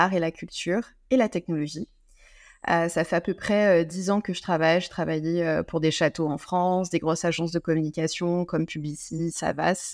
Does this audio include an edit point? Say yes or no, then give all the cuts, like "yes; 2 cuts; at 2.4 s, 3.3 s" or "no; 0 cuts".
no; 0 cuts